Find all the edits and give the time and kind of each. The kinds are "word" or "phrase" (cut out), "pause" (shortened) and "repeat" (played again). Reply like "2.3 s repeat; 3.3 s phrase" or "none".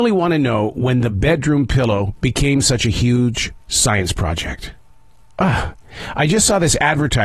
none